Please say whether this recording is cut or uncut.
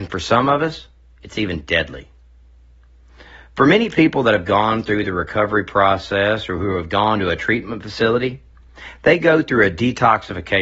uncut